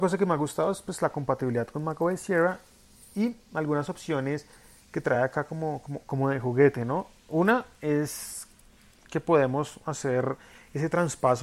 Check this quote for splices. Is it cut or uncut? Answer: uncut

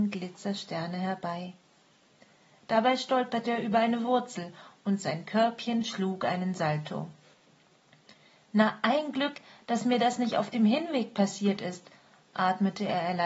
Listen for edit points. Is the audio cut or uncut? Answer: uncut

